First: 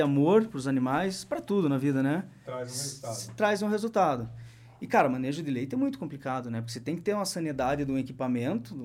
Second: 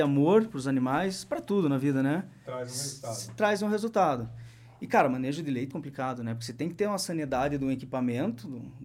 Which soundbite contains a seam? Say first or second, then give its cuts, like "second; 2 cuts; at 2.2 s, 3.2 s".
second; 1 cut; at 5.7 s